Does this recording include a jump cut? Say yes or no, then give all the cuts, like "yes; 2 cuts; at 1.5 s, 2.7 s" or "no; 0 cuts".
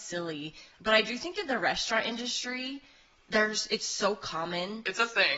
no; 0 cuts